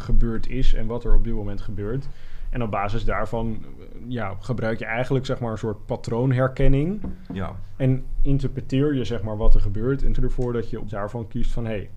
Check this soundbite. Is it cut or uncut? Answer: cut